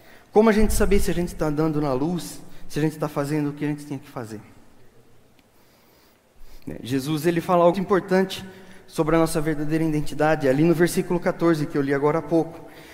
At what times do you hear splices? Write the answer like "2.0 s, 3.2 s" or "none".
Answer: 7.7 s